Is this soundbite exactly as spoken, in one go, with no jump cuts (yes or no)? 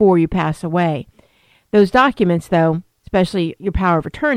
yes